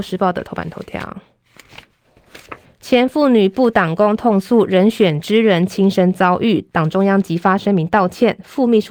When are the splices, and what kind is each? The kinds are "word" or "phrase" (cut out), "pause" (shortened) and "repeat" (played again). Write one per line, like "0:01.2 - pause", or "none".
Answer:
0:02.6 - pause